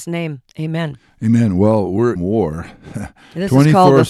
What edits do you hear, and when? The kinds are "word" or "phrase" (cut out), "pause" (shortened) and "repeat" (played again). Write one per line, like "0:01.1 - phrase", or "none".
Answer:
0:02.2 - word